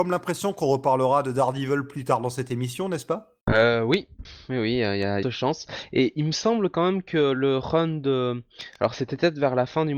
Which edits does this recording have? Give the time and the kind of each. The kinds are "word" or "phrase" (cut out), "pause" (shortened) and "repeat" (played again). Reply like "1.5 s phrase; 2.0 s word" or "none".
3.4 s pause; 5.2 s phrase